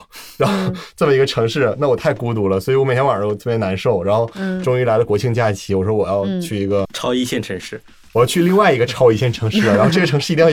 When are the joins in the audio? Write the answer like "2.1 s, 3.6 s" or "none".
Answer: 6.8 s